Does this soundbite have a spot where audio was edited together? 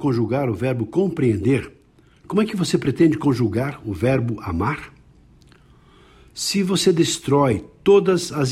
no; 0 cuts

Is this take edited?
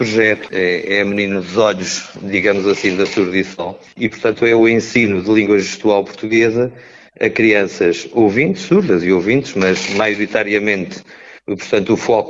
no; 0 cuts

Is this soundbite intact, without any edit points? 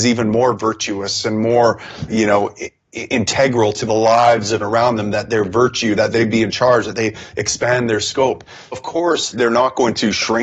no; 4 cuts; at 2.1 s, 4.6 s, 8.7 s, 9.3 s

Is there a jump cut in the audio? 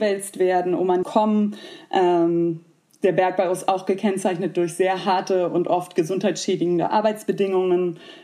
yes; 1 cut; at 1.0 s

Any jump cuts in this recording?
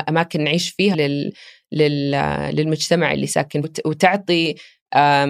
yes; 2 cuts; at 0.9 s, 3.6 s

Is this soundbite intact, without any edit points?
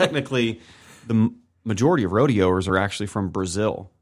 yes; 0 cuts

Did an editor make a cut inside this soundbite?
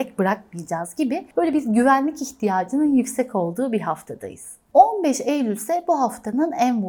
no; 0 cuts

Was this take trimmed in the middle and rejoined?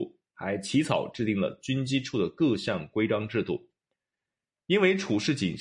no; 0 cuts

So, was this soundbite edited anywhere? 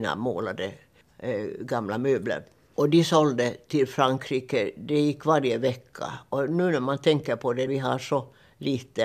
yes; 1 cut; at 7.7 s

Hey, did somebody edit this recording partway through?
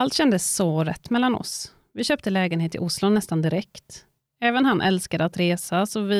no; 0 cuts

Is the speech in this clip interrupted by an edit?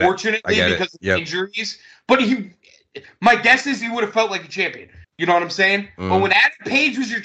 yes; 1 cut; at 5.0 s

